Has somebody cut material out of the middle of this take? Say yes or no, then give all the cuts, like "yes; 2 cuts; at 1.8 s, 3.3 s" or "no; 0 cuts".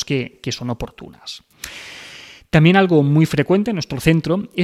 no; 0 cuts